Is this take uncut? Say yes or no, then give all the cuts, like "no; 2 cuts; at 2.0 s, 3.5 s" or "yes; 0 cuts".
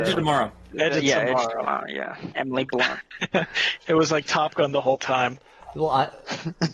yes; 0 cuts